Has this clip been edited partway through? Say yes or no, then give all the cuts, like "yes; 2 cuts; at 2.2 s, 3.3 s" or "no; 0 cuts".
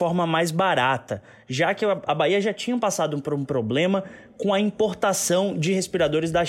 no; 0 cuts